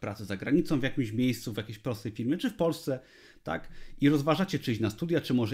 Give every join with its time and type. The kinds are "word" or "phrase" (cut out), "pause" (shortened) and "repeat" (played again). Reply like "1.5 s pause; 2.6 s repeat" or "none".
none